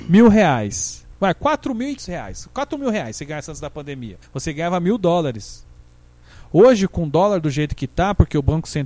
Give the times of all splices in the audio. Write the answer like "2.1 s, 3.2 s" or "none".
2.0 s, 4.2 s